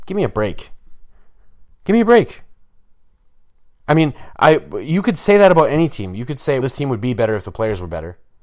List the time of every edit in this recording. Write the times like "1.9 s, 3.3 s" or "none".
1.7 s, 6.6 s